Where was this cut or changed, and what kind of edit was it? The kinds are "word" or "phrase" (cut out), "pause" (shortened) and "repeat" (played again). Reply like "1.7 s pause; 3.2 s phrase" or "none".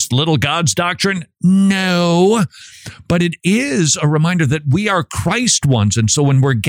none